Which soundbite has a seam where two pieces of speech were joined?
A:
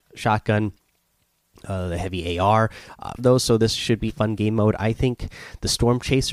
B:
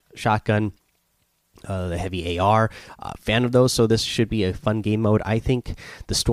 A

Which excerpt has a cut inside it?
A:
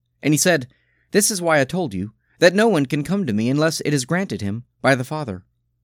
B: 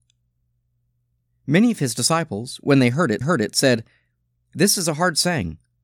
B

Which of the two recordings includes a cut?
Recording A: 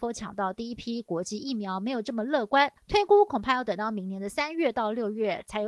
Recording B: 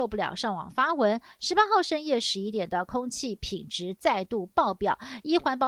A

